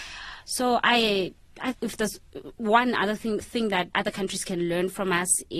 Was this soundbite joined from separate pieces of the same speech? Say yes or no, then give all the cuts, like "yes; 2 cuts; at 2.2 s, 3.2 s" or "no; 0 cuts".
yes; 3 cuts; at 1.7 s, 3.4 s, 3.9 s